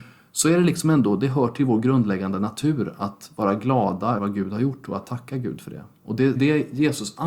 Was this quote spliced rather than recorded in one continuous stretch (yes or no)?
yes